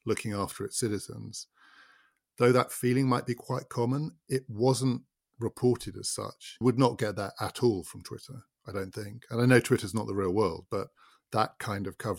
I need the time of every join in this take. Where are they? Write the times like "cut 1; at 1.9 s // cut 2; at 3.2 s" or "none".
cut 1; at 6.6 s